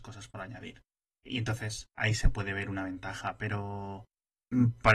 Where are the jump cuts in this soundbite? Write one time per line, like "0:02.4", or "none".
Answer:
0:01.9